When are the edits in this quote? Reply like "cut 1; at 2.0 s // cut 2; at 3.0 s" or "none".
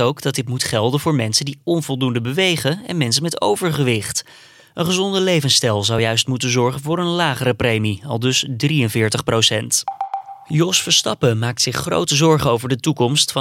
none